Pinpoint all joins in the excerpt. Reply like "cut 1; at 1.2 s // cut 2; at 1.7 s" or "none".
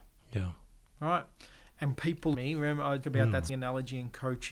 cut 1; at 1.9 s // cut 2; at 2.3 s // cut 3; at 3.0 s // cut 4; at 3.5 s